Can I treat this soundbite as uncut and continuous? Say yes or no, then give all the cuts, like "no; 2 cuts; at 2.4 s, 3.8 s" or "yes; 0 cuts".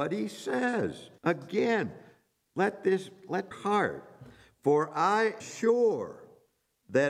no; 3 cuts; at 1.2 s, 3.5 s, 5.4 s